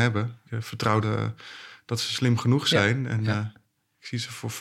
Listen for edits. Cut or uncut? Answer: cut